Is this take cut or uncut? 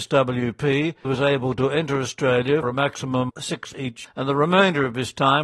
cut